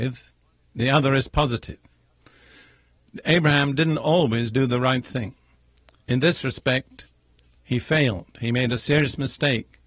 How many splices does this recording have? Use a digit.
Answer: 0